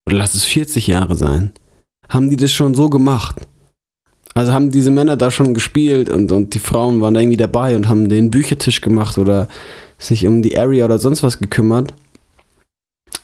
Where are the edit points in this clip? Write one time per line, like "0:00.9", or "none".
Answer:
none